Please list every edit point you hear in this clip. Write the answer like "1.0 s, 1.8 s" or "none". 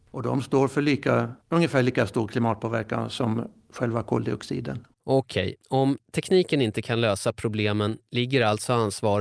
1.4 s, 4.9 s, 5.6 s